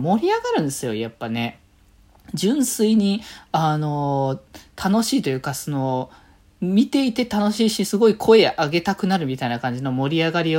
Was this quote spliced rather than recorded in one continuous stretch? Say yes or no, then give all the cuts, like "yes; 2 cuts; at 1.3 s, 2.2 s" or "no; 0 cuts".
no; 0 cuts